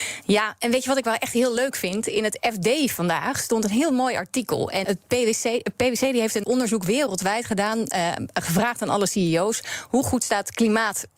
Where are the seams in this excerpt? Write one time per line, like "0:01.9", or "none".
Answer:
0:04.8
0:06.4